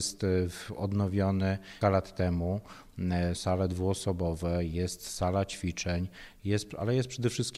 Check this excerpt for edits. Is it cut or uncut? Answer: cut